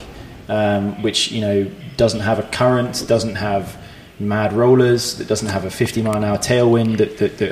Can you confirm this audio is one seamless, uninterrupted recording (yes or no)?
yes